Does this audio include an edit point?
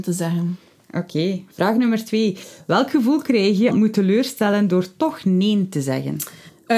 yes; 2 cuts; at 1.5 s, 3.7 s

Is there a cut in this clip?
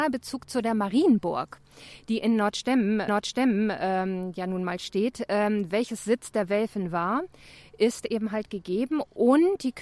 yes; 1 cut; at 3.1 s

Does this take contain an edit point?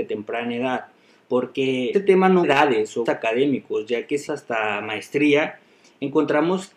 yes; 4 cuts; at 1.9 s, 2.4 s, 3.1 s, 4.3 s

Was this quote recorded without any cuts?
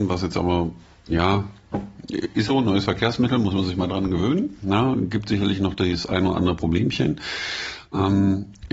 no; 1 cut; at 2.5 s

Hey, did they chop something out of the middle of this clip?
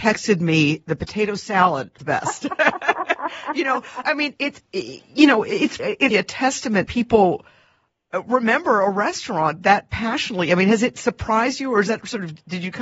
yes; 6 cuts; at 2.0 s, 4.0 s, 4.4 s, 5.8 s, 6.1 s, 6.9 s

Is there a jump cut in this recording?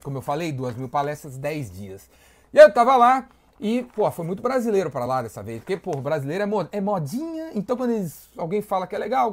no; 0 cuts

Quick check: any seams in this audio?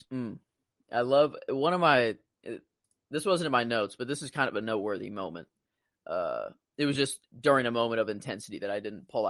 no; 0 cuts

